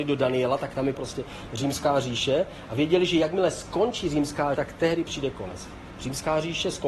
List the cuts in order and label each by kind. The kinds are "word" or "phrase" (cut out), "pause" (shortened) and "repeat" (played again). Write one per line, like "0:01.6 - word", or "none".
0:00.9 - word
0:04.5 - word
0:05.0 - word

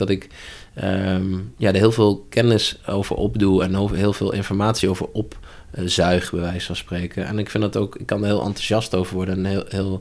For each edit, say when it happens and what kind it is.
none

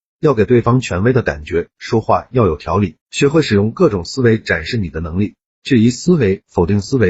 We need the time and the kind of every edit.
0:03.0 - pause

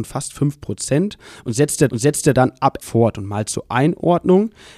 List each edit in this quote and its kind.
0:01.9 - repeat
0:02.8 - phrase

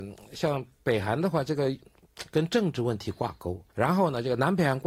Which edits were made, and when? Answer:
0:03.7 - pause

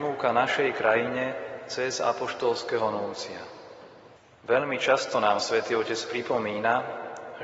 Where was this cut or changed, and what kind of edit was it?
0:04.2 - pause

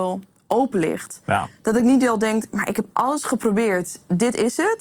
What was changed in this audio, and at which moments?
none

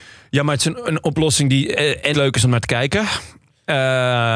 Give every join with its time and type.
0:02.1 - word

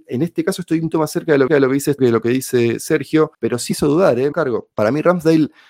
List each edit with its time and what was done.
0:00.9 - word
0:01.5 - repeat
0:02.0 - word
0:03.3 - pause
0:03.7 - word
0:04.3 - word
0:04.7 - pause

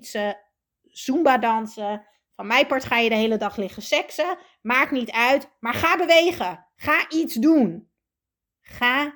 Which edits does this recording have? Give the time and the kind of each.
none

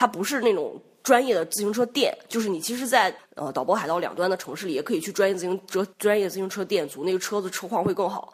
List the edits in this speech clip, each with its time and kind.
0:05.9 - pause

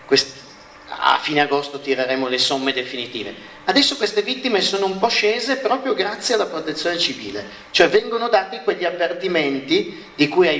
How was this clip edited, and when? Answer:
none

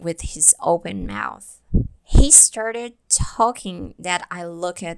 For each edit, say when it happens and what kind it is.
0:02.0 - pause

